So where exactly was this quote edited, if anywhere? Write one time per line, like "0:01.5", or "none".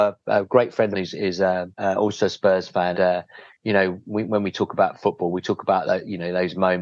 0:00.9
0:01.7
0:02.9